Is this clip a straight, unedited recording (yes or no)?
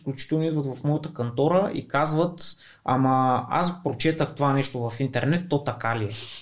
yes